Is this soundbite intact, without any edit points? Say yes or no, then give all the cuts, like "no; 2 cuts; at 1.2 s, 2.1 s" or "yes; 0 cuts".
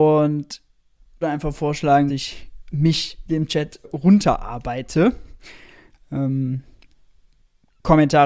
no; 4 cuts; at 1.2 s, 2.1 s, 2.7 s, 3.8 s